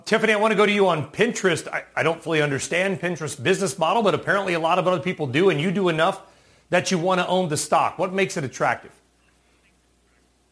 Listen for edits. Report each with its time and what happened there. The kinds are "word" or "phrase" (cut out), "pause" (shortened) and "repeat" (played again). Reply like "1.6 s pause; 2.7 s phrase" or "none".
none